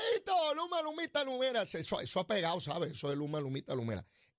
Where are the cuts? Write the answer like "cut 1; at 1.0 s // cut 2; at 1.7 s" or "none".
none